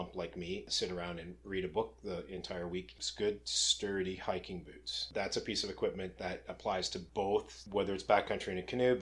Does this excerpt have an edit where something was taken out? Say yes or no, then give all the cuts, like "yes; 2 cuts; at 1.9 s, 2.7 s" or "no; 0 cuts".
no; 0 cuts